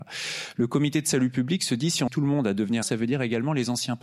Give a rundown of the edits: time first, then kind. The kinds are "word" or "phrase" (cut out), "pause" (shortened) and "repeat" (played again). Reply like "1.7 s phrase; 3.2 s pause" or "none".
2.1 s word; 2.8 s word